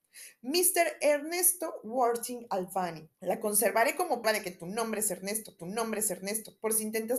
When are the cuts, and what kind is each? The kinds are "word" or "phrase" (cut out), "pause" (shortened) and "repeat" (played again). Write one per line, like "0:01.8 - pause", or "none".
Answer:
0:03.1 - pause
0:04.2 - word
0:05.6 - repeat

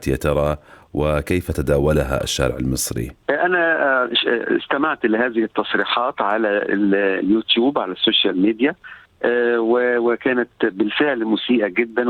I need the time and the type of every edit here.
none

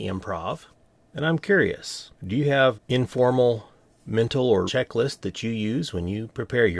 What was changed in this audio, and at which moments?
0:02.2 - pause
0:02.7 - word
0:04.7 - word

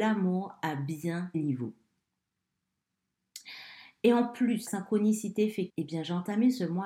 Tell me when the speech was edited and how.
0:01.3 - word
0:04.7 - word
0:05.7 - word

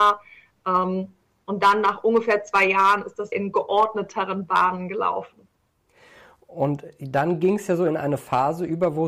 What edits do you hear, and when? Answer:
0:03.3 - word

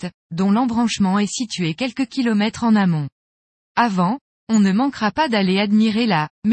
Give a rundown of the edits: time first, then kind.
none

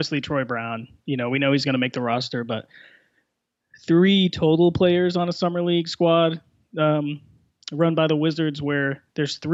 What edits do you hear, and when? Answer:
none

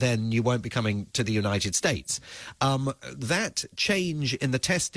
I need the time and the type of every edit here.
none

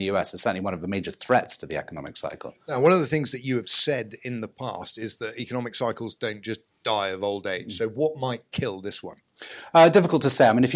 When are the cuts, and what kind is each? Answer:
none

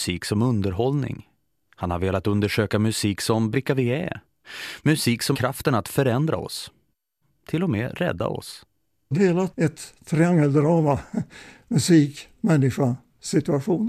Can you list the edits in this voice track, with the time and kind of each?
0:03.5 - word
0:05.3 - word
0:09.1 - word
0:09.5 - word

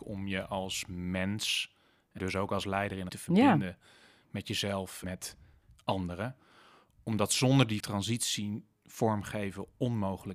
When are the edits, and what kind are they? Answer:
0:02.2 - word
0:03.1 - word
0:05.0 - word
0:07.8 - word

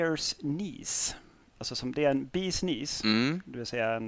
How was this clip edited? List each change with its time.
none

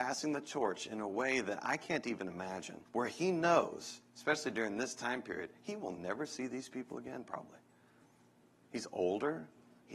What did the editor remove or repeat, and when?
0:02.9 - pause

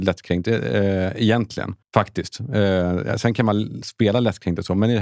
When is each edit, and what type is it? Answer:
0:01.8 - pause

